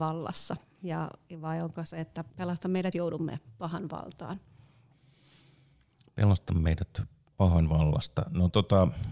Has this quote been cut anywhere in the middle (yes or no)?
yes